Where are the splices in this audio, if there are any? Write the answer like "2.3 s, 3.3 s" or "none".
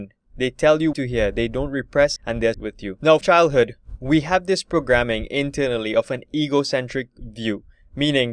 0.9 s, 2.2 s, 2.5 s, 3.2 s